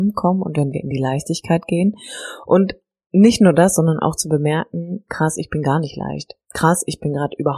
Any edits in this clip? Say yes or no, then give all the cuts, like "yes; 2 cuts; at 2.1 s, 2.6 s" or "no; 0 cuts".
no; 0 cuts